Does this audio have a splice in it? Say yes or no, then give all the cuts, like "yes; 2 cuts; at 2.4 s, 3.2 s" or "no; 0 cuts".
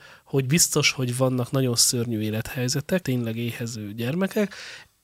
yes; 1 cut; at 3.0 s